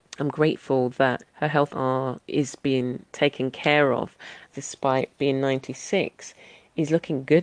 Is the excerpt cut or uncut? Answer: cut